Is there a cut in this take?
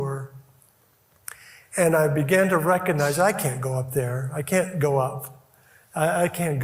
no; 0 cuts

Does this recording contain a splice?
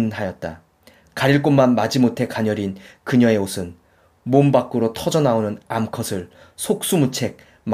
no; 0 cuts

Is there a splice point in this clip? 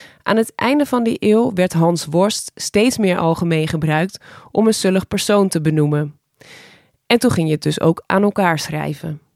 no; 0 cuts

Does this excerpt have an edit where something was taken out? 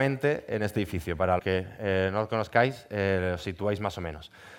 yes; 1 cut; at 1.4 s

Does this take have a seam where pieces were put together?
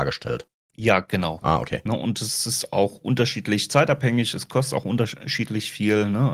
no; 0 cuts

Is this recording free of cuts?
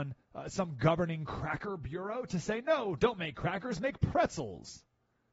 yes; 0 cuts

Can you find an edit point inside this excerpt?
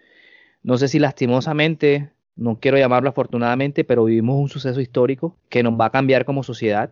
yes; 2 cuts; at 2.2 s, 5.4 s

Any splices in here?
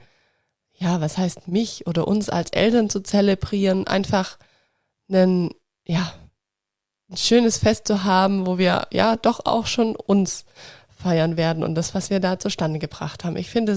no; 0 cuts

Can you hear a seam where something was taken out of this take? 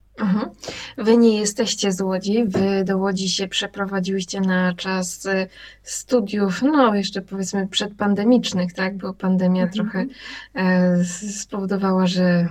no; 0 cuts

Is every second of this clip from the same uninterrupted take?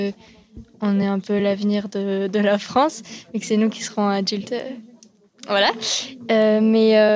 yes; 0 cuts

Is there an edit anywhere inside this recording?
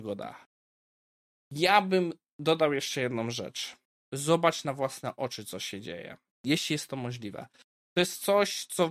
no; 0 cuts

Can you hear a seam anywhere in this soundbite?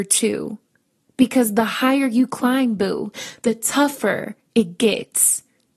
no; 0 cuts

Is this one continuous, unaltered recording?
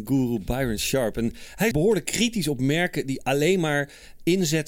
no; 1 cut; at 1.7 s

